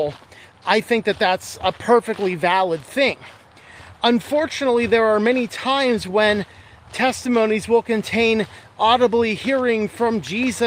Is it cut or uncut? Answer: uncut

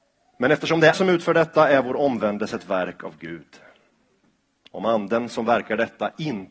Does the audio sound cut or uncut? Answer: cut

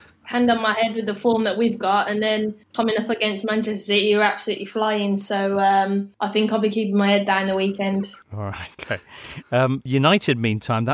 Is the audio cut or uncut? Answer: cut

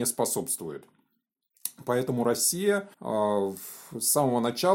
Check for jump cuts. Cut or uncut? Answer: cut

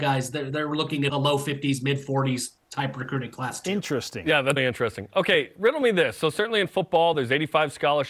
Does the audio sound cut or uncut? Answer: cut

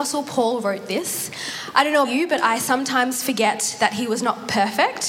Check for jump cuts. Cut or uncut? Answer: cut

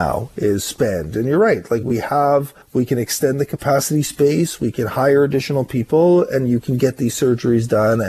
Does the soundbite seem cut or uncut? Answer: cut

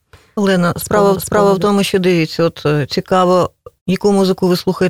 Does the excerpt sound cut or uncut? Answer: cut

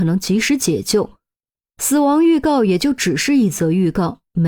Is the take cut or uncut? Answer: uncut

